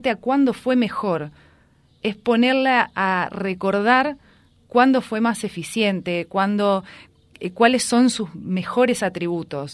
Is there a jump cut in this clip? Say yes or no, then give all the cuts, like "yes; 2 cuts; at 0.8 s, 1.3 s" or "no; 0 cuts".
no; 0 cuts